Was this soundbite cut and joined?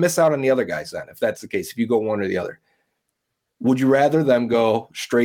no; 0 cuts

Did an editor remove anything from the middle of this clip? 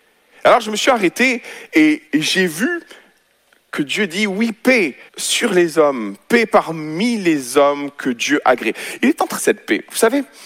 yes; 3 cuts; at 2.1 s, 5.1 s, 9.4 s

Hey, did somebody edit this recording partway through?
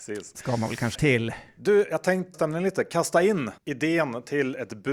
yes; 3 cuts; at 0.9 s, 2.3 s, 3.6 s

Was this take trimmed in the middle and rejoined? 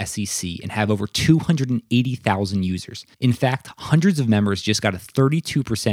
yes; 1 cut; at 3.1 s

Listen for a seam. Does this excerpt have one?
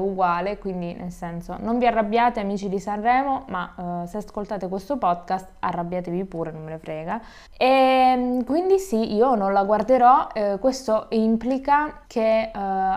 yes; 2 cuts; at 7.5 s, 12.1 s

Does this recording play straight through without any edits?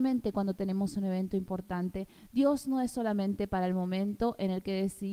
yes; 0 cuts

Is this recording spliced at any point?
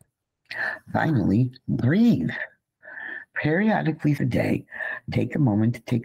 yes; 1 cut; at 4.2 s

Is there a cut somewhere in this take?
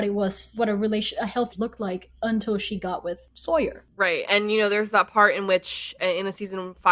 yes; 2 cuts; at 1.5 s, 4.3 s

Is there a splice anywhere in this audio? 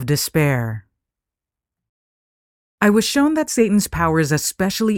no; 0 cuts

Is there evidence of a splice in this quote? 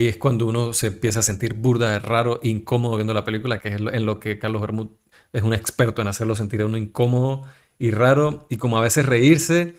yes; 1 cut; at 5.1 s

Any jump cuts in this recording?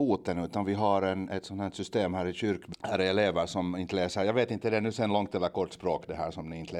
yes; 1 cut; at 2.7 s

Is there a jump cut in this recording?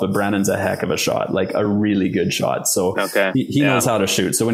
no; 0 cuts

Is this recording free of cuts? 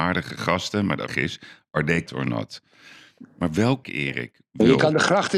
no; 3 cuts; at 1.1 s, 2.1 s, 3.8 s

